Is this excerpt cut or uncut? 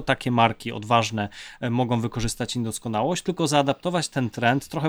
uncut